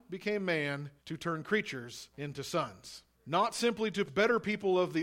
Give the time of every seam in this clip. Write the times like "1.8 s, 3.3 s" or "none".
1.0 s, 2.1 s, 3.1 s, 4.1 s